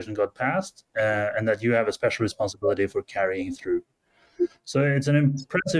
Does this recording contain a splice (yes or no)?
no